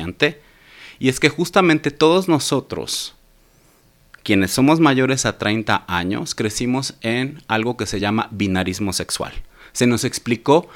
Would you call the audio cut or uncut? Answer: uncut